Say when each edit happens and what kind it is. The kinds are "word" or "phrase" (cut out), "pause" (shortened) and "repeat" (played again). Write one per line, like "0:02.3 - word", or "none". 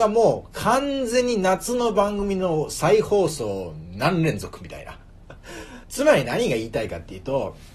0:05.8 - pause